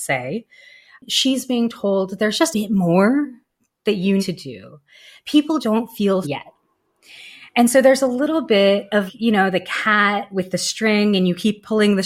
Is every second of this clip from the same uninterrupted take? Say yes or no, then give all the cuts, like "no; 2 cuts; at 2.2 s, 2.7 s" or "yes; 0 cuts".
no; 5 cuts; at 2.5 s, 4.2 s, 5.6 s, 6.2 s, 9.1 s